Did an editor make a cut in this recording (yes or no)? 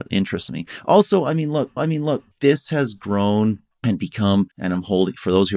yes